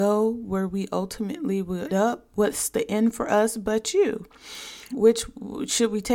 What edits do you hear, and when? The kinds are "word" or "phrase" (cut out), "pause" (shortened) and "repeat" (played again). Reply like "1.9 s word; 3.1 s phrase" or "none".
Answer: 1.9 s word; 4.9 s word